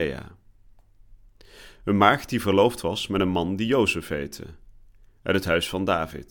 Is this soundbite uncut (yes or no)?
yes